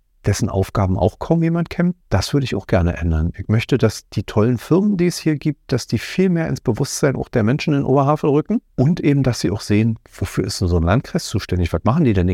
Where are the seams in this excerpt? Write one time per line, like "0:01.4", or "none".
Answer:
0:02.0
0:08.7
0:10.0

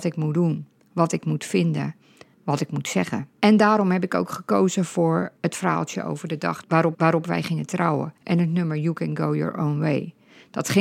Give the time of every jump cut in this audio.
0:02.3
0:03.3
0:06.9
0:08.2

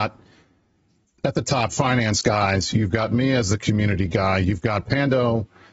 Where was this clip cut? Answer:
0:01.7

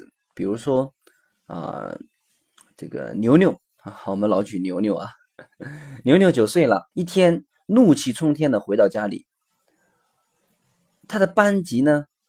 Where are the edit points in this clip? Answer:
0:06.9

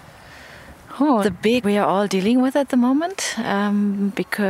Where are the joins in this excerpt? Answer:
0:01.2
0:01.6

